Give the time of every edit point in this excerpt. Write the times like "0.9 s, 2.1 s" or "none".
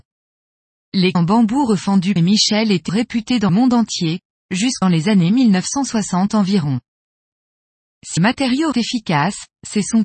1.1 s, 2.2 s, 2.9 s, 3.5 s, 4.8 s, 8.2 s, 8.7 s

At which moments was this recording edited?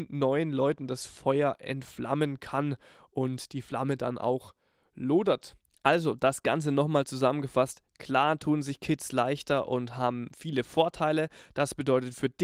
none

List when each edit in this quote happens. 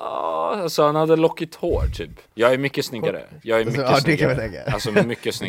2.3 s

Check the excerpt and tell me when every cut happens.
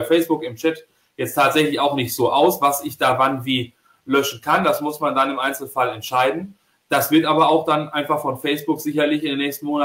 none

